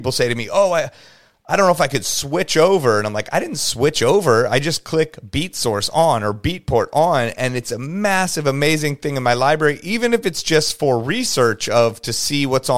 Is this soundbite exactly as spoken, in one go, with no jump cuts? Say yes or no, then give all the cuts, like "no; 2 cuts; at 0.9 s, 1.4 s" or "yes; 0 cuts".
yes; 0 cuts